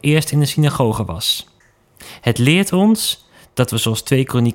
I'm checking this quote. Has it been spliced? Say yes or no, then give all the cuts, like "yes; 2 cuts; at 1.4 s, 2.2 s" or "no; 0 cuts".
no; 0 cuts